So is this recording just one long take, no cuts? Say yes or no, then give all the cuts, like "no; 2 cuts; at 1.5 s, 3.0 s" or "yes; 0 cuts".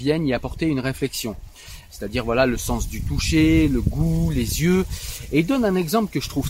yes; 0 cuts